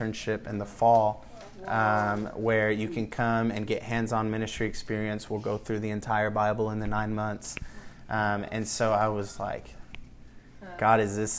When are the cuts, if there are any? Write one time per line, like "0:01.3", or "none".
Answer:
none

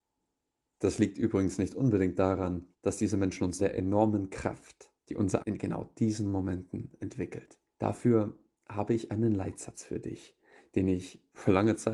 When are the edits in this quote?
0:02.7
0:03.6
0:05.0
0:05.4
0:07.7

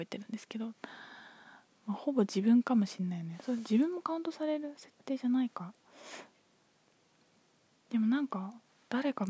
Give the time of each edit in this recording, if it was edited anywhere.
none

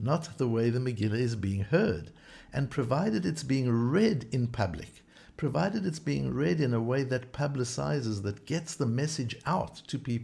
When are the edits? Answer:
none

